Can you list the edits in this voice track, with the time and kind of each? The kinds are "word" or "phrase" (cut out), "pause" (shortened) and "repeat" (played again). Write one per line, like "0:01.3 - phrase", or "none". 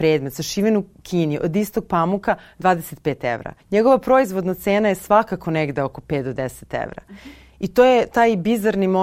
0:03.6 - pause